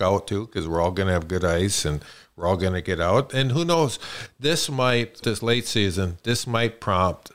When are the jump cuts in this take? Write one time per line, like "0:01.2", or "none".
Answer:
0:05.2